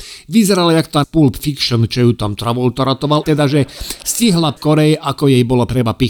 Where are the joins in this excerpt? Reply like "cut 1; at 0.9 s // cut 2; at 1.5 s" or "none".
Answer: cut 1; at 1.0 s // cut 2; at 3.2 s // cut 3; at 4.6 s